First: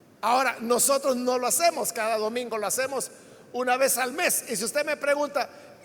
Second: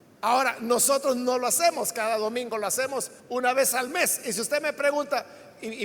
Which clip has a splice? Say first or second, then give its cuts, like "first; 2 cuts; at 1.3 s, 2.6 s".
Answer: second; 1 cut; at 3.2 s